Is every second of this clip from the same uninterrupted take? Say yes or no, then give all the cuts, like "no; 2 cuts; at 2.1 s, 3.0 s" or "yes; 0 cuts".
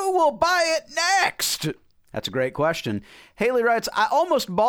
yes; 0 cuts